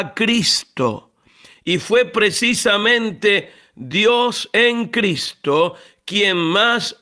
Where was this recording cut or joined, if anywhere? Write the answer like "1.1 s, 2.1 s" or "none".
none